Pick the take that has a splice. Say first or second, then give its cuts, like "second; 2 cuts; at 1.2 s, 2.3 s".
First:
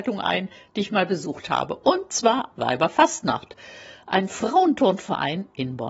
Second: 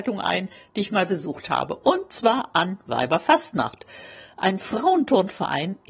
first; 1 cut; at 2.5 s